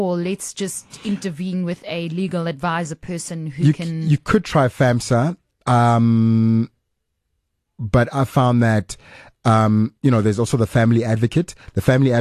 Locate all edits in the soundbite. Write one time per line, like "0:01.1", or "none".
0:10.0